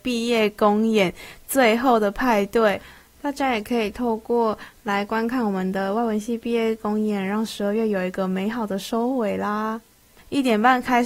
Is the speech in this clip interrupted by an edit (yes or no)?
no